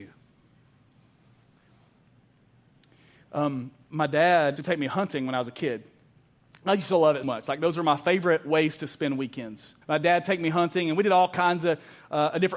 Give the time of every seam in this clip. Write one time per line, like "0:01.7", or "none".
0:04.6
0:07.2
0:09.8